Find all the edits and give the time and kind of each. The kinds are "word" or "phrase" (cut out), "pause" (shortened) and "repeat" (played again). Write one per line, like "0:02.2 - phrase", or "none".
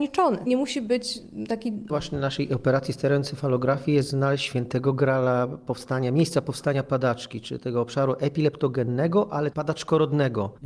0:01.9 - word
0:09.5 - phrase